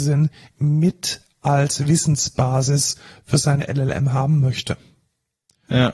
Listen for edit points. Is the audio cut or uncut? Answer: uncut